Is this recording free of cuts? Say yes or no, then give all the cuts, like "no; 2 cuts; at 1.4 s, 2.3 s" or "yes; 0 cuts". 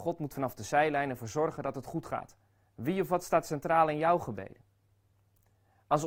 no; 1 cut; at 2.7 s